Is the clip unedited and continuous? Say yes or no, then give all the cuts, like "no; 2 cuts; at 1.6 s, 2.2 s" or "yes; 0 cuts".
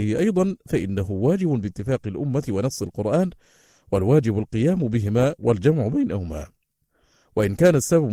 yes; 0 cuts